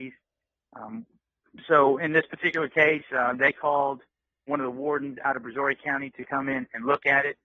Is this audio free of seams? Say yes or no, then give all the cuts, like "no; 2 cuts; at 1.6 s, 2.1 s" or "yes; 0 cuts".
yes; 0 cuts